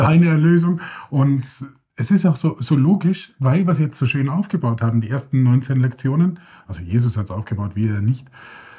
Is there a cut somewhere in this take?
no; 0 cuts

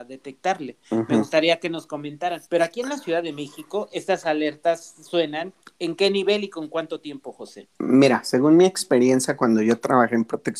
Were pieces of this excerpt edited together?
yes; 2 cuts; at 2.5 s, 5.6 s

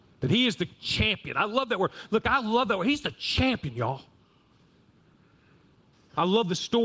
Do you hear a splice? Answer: no; 0 cuts

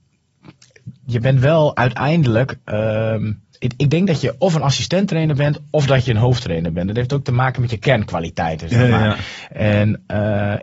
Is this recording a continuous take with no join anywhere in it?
no; 1 cut; at 3.5 s

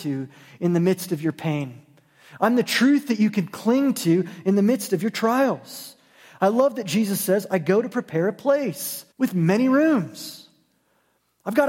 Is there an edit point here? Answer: yes; 1 cut; at 9.1 s

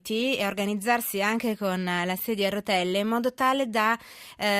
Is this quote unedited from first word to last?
yes; 0 cuts

